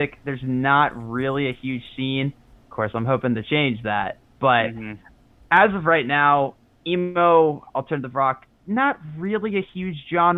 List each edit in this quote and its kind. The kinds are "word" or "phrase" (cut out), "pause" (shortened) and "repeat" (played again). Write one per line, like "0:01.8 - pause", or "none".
none